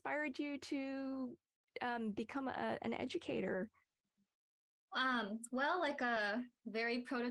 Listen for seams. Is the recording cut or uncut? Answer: uncut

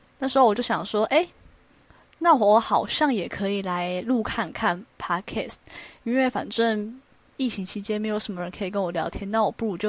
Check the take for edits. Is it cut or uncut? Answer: uncut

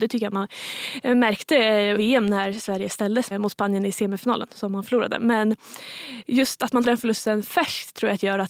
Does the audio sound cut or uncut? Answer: cut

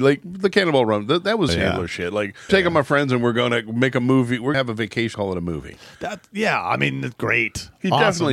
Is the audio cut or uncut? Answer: cut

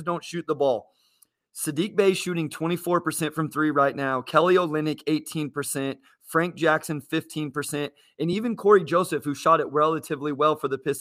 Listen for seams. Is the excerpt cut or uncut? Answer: uncut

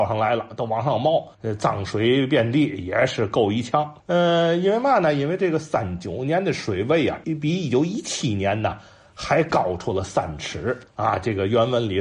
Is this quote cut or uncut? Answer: cut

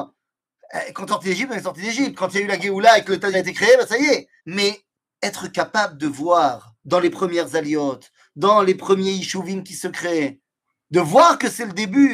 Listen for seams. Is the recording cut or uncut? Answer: cut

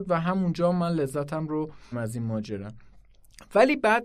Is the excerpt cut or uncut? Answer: cut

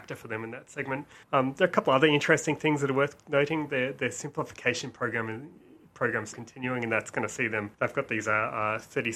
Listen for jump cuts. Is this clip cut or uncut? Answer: cut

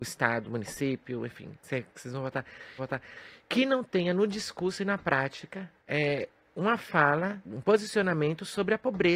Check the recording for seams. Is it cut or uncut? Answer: cut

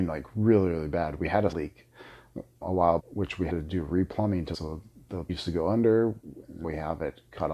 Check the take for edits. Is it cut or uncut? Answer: cut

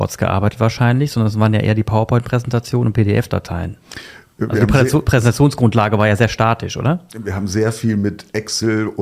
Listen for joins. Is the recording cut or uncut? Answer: uncut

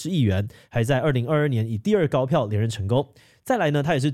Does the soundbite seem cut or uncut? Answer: uncut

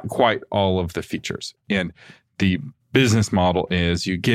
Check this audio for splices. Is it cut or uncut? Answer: uncut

